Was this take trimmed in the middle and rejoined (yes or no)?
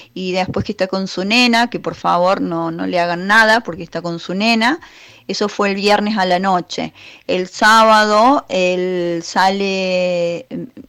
no